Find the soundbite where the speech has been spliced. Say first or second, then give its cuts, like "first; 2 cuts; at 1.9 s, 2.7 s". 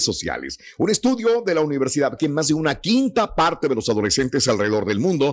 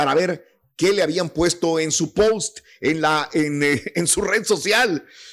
first; 1 cut; at 2.2 s